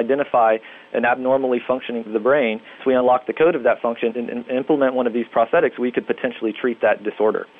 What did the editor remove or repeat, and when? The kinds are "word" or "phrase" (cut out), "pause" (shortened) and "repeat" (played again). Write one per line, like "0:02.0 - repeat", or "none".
0:02.1 - word
0:02.8 - word
0:04.1 - word